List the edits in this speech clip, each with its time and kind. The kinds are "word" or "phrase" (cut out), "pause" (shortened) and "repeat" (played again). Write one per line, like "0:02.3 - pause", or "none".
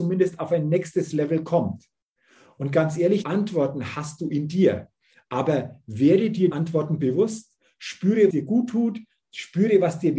0:03.2 - word
0:06.5 - word
0:08.3 - word